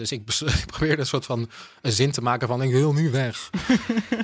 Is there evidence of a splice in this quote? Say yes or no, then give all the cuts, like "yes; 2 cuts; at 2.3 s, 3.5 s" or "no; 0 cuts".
no; 0 cuts